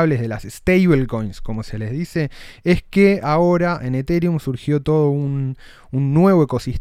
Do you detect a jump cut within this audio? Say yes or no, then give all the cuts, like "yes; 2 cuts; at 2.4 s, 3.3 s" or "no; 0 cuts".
no; 0 cuts